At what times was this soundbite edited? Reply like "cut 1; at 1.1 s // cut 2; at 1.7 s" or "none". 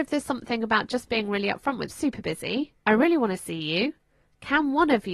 cut 1; at 1.9 s // cut 2; at 2.8 s